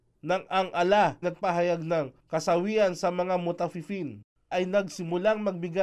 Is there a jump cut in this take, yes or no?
yes